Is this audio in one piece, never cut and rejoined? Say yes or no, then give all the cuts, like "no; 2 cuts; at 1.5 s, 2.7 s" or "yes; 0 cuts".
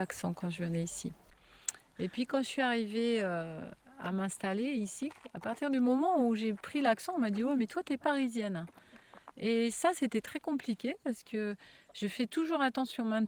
yes; 0 cuts